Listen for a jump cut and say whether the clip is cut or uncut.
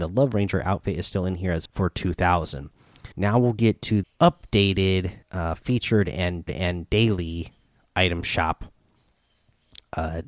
cut